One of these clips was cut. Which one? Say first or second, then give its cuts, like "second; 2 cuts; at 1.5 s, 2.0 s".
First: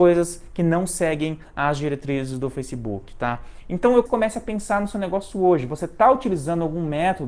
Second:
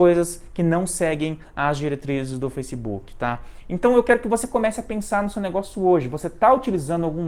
first; 1 cut; at 4.1 s